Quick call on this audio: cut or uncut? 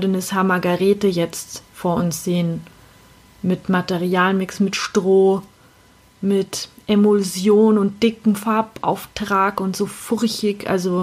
uncut